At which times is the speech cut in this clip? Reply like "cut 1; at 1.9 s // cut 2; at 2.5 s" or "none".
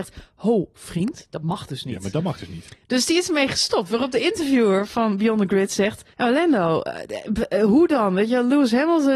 cut 1; at 6.1 s